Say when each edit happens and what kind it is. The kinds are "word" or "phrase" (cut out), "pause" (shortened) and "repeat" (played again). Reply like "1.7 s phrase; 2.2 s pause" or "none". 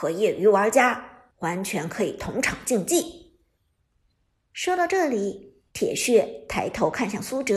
none

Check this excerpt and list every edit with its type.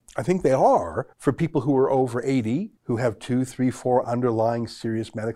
1.1 s pause; 2.8 s pause

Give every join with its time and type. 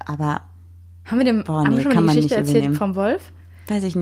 none

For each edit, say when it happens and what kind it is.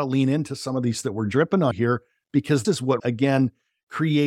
1.0 s word; 1.7 s word; 2.6 s word; 3.0 s word

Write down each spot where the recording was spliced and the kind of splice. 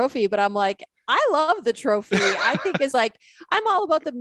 2.9 s word

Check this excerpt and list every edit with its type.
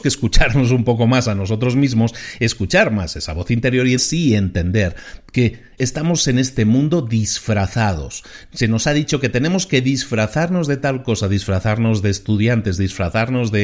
4.0 s word; 5.8 s phrase

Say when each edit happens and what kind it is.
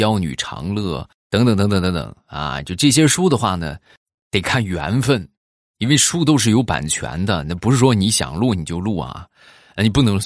1.2 s pause

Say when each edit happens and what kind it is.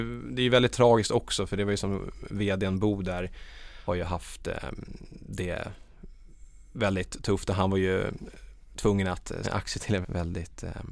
3.9 s word; 9.4 s phrase; 10.0 s word

